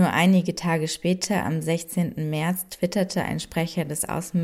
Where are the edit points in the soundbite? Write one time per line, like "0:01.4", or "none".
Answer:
none